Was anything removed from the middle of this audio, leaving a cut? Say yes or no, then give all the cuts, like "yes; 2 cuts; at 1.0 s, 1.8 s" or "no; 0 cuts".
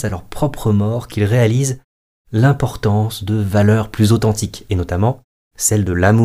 no; 0 cuts